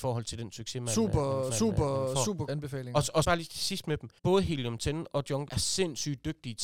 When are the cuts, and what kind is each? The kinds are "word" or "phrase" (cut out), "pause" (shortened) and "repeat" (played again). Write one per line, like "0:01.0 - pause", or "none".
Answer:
0:01.5 - repeat
0:02.5 - word
0:03.2 - word
0:04.2 - pause
0:05.5 - word